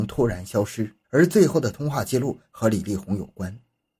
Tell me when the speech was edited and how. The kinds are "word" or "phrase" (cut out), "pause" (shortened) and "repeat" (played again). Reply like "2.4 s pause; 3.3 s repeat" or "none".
1.0 s pause